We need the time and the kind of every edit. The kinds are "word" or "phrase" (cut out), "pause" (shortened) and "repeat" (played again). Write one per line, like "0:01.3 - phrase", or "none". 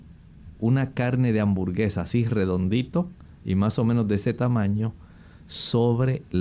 none